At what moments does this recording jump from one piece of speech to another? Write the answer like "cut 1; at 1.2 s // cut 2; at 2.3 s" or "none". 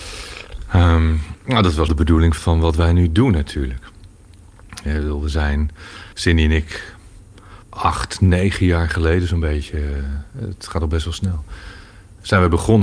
cut 1; at 1.9 s // cut 2; at 2.4 s // cut 3; at 6.1 s // cut 4; at 7.6 s